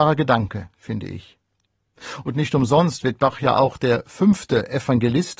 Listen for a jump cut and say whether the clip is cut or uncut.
uncut